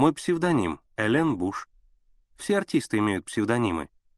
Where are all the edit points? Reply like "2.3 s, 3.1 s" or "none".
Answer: none

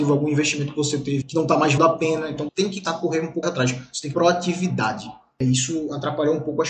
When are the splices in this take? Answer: 1.2 s, 1.8 s, 2.5 s, 2.8 s, 3.4 s, 4.1 s

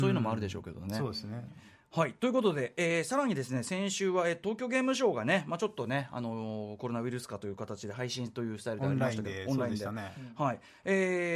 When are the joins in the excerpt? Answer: 4.4 s

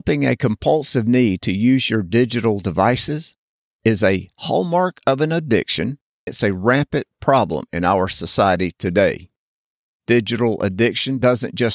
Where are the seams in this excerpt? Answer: 6.3 s

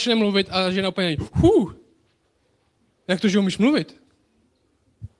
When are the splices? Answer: none

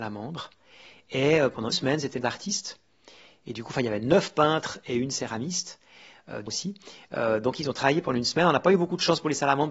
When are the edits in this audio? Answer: 1.7 s, 2.2 s, 6.5 s

